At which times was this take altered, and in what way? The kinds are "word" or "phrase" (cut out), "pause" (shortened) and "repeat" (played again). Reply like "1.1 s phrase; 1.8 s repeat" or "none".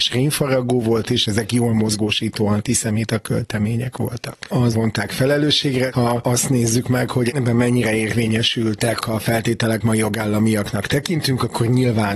4.7 s word; 9.0 s word; 9.8 s word